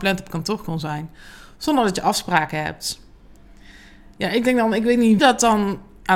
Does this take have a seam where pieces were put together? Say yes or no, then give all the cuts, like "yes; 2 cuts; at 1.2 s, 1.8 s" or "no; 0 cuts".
yes; 1 cut; at 5.2 s